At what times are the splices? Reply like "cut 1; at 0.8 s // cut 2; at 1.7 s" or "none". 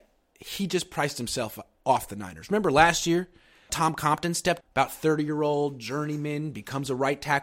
cut 1; at 3.7 s // cut 2; at 4.6 s